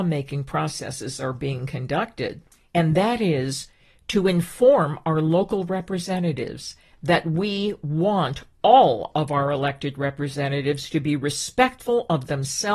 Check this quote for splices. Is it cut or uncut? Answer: cut